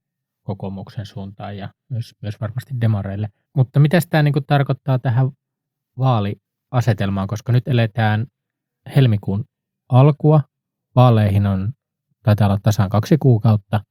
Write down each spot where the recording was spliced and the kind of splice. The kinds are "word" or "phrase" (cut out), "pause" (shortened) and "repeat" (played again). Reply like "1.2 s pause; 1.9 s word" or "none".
none